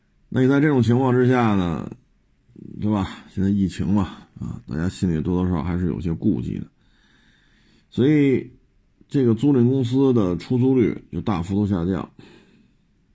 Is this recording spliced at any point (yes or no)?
no